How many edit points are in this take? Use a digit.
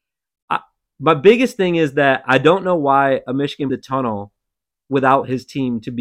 1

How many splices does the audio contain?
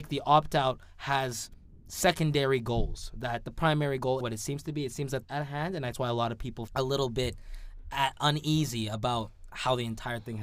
4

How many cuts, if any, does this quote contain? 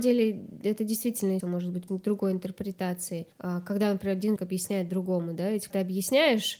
5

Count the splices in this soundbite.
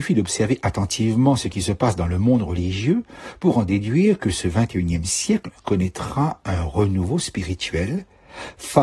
0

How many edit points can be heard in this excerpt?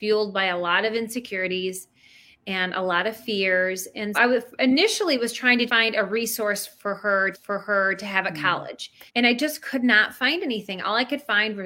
4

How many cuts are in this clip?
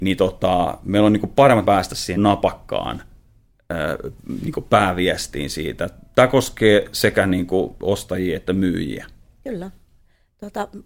2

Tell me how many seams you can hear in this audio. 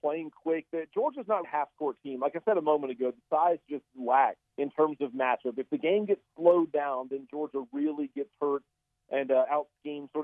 2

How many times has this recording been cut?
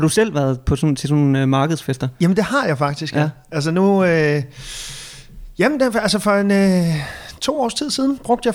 0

